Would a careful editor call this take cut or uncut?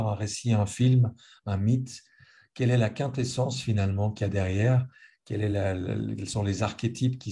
uncut